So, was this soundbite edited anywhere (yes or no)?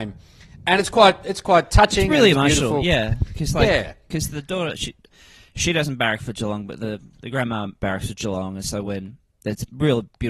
no